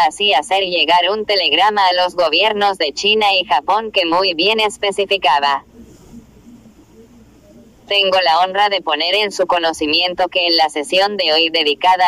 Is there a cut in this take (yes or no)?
no